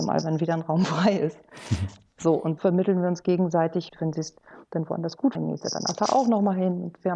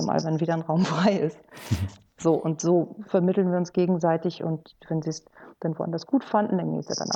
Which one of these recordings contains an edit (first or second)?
first